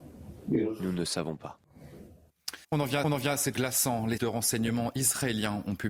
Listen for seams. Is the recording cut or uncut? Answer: cut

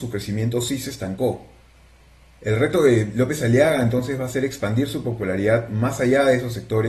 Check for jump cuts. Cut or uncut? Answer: uncut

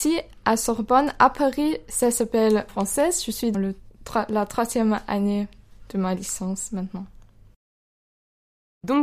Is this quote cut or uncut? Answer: cut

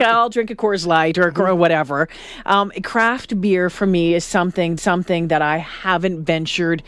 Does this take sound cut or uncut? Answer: cut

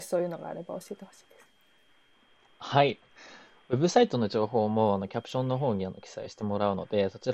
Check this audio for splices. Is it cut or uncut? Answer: uncut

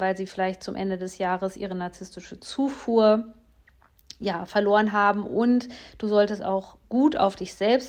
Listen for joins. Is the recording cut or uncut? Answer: cut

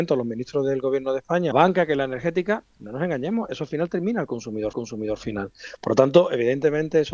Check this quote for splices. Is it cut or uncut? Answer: cut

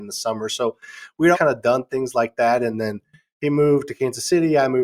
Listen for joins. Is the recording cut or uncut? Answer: cut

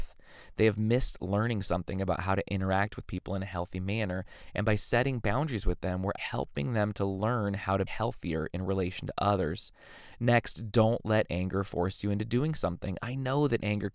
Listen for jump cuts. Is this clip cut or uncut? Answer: cut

